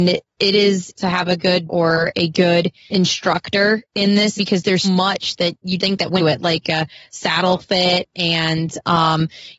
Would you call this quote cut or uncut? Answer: cut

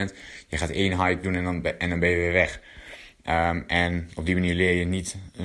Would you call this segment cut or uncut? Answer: uncut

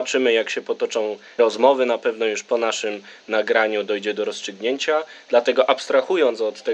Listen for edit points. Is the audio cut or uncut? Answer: cut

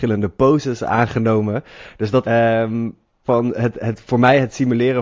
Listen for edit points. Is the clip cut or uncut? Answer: cut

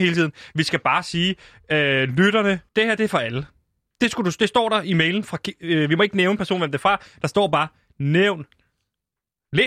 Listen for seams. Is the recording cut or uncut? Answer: cut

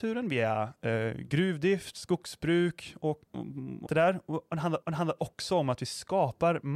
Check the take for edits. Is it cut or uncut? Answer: cut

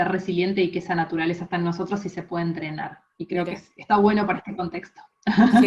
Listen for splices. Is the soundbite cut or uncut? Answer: cut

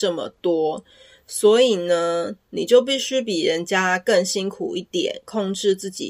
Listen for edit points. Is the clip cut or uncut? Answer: uncut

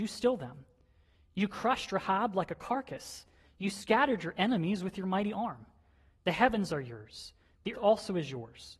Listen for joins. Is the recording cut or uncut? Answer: cut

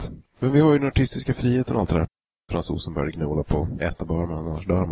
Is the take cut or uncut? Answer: uncut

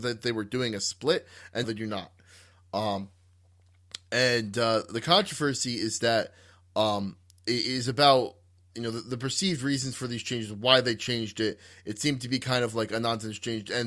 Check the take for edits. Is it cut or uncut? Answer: cut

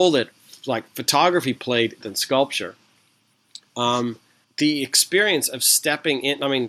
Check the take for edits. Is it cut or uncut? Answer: cut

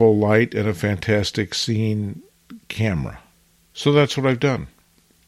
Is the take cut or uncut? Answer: cut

